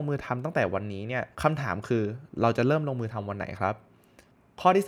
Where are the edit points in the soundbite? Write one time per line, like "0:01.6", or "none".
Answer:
0:01.3

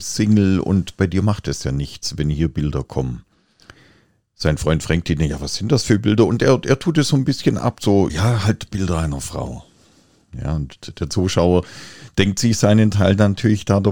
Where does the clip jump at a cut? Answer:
0:08.1

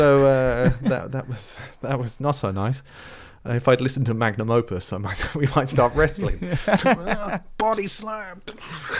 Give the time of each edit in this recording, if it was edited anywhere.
none

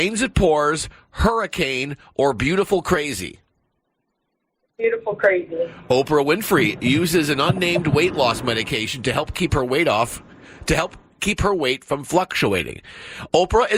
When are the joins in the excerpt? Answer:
none

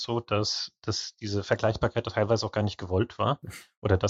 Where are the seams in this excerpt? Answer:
none

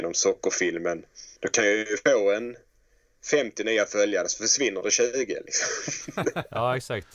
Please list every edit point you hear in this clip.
0:01.4

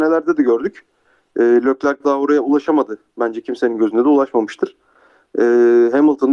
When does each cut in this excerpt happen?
none

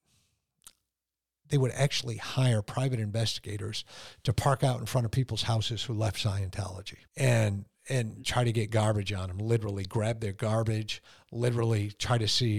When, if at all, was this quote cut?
0:07.1

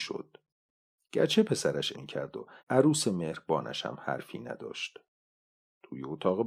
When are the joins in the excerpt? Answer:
0:01.9
0:02.6

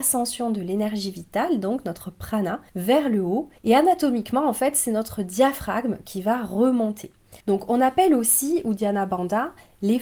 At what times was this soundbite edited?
0:02.7
0:03.6
0:07.4

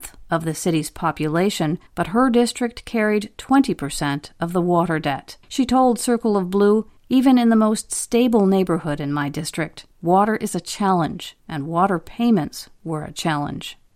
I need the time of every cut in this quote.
0:01.9
0:05.4
0:07.0
0:09.9
0:11.4

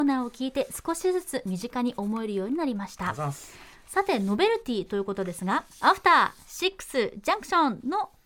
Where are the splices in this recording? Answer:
0:05.7

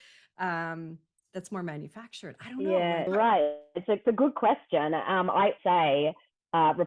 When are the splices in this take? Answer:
0:03.1
0:04.0
0:05.6

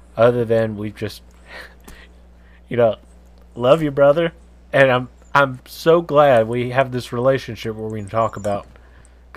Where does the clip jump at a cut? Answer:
none

